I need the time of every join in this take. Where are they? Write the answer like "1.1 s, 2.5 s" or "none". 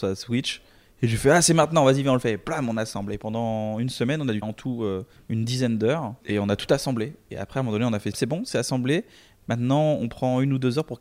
4.4 s, 5.2 s, 6.2 s, 8.1 s